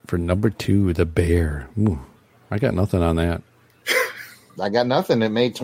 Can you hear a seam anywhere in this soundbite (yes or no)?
no